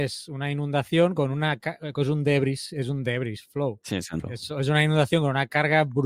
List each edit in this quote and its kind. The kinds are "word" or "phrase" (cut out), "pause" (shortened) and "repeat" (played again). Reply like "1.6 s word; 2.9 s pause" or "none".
4.2 s word